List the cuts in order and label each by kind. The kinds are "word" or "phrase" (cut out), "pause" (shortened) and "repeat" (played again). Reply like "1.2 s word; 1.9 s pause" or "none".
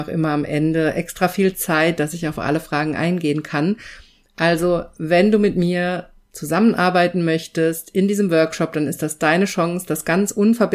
none